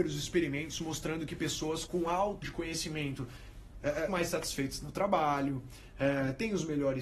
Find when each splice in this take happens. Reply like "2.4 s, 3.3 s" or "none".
1.9 s, 2.4 s, 4.1 s